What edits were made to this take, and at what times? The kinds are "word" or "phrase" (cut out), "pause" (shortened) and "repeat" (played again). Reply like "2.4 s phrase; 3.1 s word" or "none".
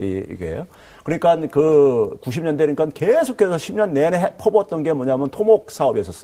none